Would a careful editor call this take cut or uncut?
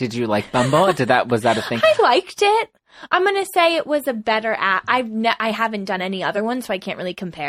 uncut